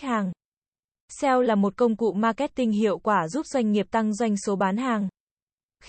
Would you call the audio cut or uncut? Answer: uncut